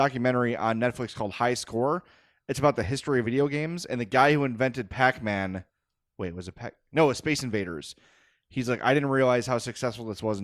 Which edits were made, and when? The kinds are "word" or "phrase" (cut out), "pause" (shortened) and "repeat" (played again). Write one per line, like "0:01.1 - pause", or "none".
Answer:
none